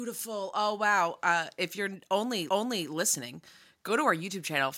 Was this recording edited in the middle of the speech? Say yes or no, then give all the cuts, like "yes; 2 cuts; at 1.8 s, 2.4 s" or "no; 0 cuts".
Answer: yes; 1 cut; at 2.5 s